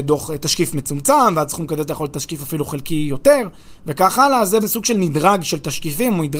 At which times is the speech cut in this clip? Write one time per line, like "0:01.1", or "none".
0:04.6